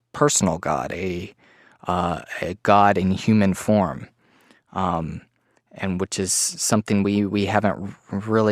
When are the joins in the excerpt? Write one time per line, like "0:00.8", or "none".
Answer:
none